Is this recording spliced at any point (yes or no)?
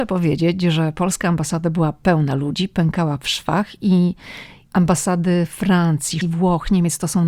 yes